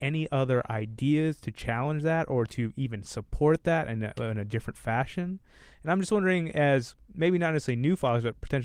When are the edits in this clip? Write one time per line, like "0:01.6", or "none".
none